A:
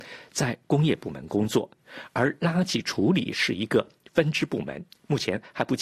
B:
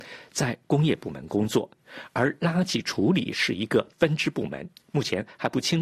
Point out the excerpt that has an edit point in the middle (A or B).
B